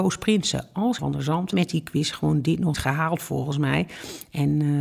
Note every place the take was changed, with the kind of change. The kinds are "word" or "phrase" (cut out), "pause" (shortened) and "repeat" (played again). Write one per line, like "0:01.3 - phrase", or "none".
0:01.0 - word
0:01.5 - word
0:02.7 - word